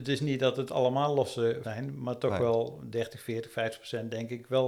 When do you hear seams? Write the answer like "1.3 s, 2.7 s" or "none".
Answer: 1.6 s

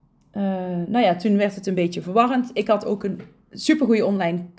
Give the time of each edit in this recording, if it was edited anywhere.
none

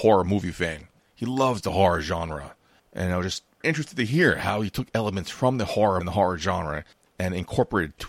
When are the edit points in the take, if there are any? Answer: 3.6 s, 6.0 s

